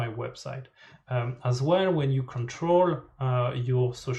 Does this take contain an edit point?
no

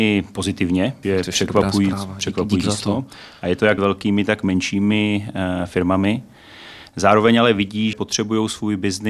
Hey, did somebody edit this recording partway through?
yes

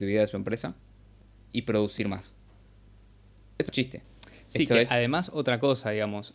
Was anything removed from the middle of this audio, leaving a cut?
yes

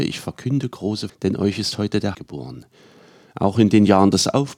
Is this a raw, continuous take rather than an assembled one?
no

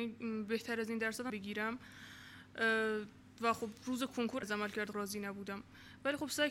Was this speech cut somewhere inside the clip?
yes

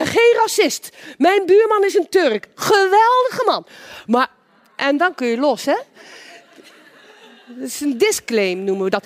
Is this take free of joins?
yes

